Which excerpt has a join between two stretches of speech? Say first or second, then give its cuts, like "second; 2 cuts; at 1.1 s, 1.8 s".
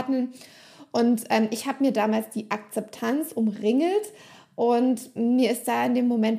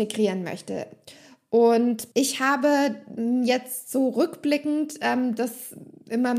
second; 1 cut; at 2.1 s